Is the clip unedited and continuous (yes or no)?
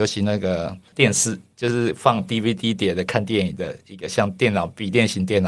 yes